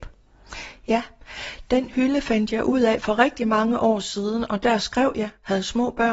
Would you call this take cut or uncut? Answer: uncut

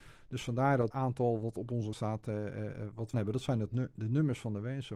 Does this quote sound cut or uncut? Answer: cut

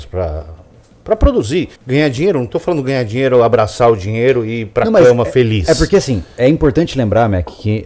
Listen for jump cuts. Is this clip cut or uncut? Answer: cut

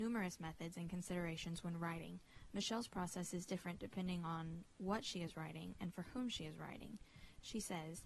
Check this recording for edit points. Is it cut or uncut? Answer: uncut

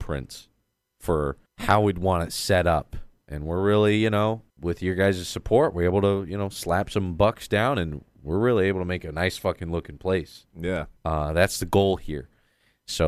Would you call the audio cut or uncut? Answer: cut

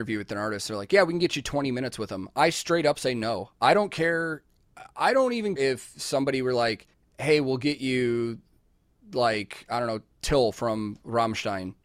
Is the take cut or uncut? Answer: cut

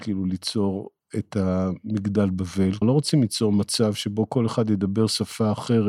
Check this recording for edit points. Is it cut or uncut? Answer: cut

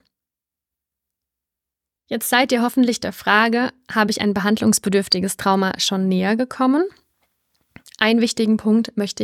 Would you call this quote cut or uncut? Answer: uncut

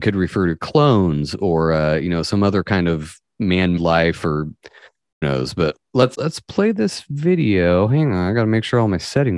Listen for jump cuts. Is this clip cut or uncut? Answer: cut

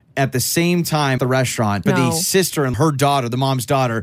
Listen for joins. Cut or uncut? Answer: cut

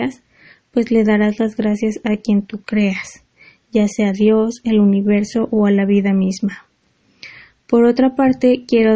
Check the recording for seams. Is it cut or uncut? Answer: uncut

